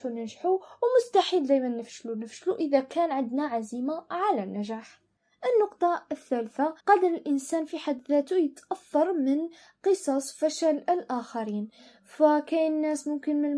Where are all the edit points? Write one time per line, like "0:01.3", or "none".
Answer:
0:06.8